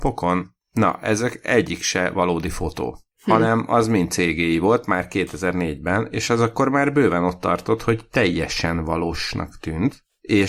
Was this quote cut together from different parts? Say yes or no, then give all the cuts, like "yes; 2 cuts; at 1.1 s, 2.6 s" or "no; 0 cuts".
no; 0 cuts